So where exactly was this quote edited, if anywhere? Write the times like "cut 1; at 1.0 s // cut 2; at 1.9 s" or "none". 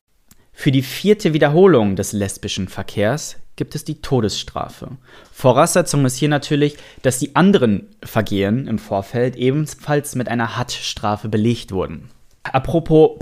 none